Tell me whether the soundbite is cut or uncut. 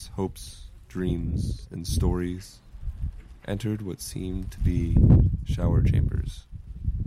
uncut